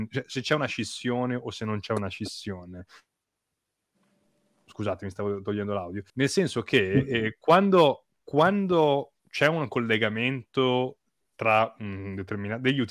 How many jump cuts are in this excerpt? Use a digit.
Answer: 2